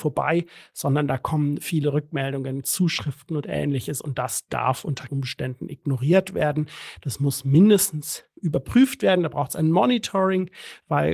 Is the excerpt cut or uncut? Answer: cut